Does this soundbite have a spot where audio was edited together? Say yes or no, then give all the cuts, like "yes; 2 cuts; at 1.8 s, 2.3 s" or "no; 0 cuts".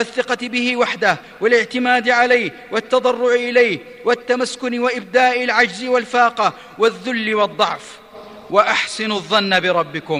no; 0 cuts